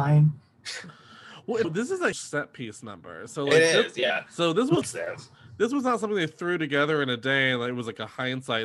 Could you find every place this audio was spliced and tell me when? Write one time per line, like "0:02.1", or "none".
0:01.6
0:02.1
0:04.8